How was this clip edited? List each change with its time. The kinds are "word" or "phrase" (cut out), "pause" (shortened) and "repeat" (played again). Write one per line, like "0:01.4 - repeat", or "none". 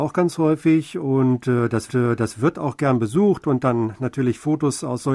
0:01.9 - repeat